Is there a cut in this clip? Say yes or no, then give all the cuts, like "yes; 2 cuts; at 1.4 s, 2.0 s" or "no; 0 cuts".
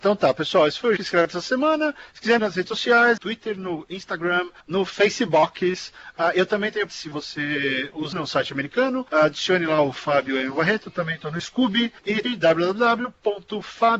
yes; 6 cuts; at 1.0 s, 2.4 s, 3.2 s, 6.9 s, 8.1 s, 12.2 s